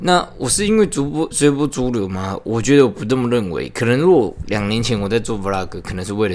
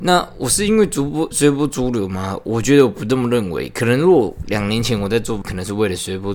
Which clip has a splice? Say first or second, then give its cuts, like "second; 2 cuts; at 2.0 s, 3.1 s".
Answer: second; 1 cut; at 5.4 s